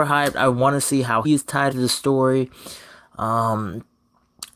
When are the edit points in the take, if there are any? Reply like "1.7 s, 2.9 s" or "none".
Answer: 1.2 s, 1.7 s